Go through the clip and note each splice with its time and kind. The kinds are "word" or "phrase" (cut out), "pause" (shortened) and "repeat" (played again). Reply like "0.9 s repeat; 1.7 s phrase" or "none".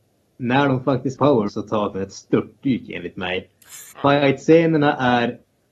1.2 s word; 1.5 s word; 1.9 s word; 3.9 s pause